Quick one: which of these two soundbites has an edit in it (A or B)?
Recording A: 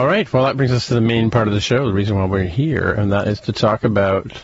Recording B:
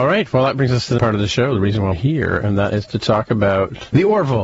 B